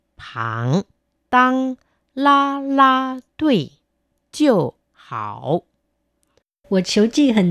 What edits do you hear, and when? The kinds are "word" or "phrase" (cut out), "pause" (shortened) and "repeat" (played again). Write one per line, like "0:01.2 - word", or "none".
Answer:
none